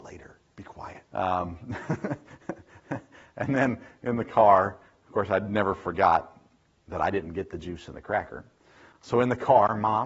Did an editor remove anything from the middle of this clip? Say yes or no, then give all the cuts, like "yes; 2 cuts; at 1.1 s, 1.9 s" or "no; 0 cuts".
yes; 1 cut; at 1.1 s